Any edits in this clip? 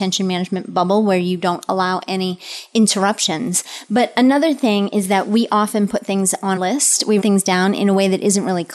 yes; 2 cuts; at 6.6 s, 7.2 s

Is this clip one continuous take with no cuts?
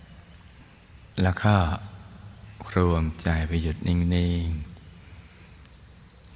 no; 1 cut; at 1.1 s

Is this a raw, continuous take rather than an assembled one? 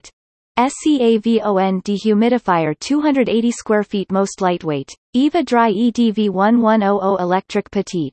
no; 1 cut; at 5.0 s

